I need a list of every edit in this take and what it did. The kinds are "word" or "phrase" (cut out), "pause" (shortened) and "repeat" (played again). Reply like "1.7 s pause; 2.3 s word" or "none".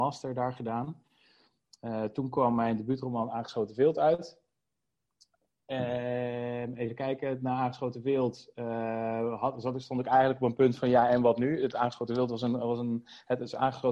none